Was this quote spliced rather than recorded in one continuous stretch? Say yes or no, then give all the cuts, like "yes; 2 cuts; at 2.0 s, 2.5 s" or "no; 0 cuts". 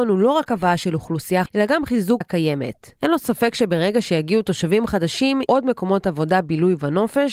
yes; 4 cuts; at 1.5 s, 2.2 s, 3.0 s, 5.5 s